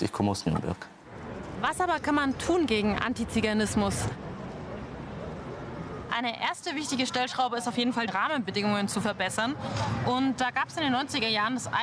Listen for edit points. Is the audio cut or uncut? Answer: cut